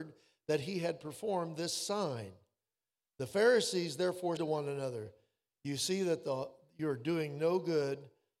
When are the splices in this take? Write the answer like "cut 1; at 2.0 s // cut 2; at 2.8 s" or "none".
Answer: cut 1; at 4.4 s